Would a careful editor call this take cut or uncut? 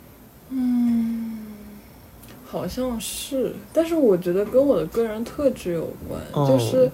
uncut